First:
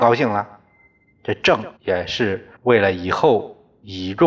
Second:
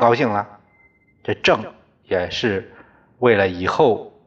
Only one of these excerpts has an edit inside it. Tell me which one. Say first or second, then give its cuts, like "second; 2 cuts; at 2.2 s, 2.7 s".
first; 2 cuts; at 1.8 s, 2.6 s